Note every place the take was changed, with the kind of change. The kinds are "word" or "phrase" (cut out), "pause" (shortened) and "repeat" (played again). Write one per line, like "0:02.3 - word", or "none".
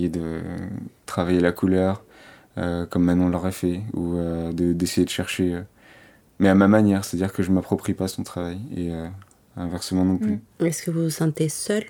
none